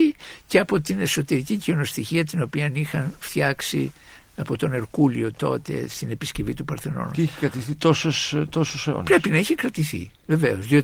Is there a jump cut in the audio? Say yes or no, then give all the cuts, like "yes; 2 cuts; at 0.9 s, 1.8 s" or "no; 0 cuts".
no; 0 cuts